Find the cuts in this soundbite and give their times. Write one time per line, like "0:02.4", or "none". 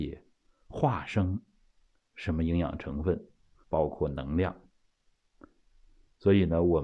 0:03.6